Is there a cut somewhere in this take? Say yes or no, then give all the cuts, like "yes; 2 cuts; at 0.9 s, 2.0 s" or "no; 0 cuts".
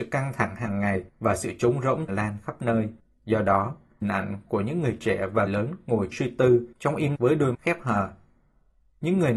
yes; 9 cuts; at 1.1 s, 2.1 s, 3.0 s, 4.0 s, 5.5 s, 6.1 s, 6.7 s, 7.2 s, 7.5 s